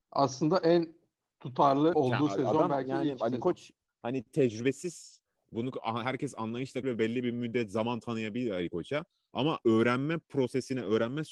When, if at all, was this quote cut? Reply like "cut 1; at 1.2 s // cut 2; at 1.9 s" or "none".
cut 1; at 1.9 s // cut 2; at 6.8 s